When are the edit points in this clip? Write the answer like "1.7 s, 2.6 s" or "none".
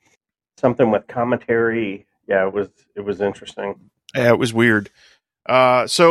none